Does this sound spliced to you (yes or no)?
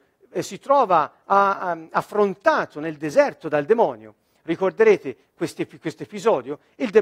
no